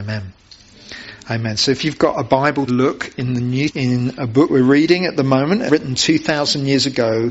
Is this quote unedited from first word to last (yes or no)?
no